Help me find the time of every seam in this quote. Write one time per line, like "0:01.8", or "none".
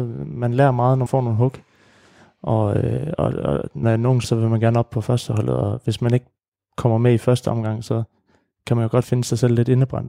0:01.1
0:03.1
0:03.8
0:04.2
0:09.0